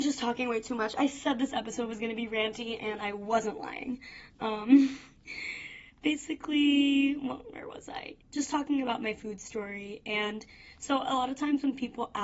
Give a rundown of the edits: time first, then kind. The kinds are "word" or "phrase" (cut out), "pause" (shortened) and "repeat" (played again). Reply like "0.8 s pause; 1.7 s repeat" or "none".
8.2 s pause